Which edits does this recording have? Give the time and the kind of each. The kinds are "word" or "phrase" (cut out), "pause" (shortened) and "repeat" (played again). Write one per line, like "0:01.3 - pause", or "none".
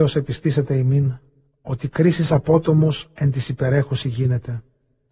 0:01.4 - pause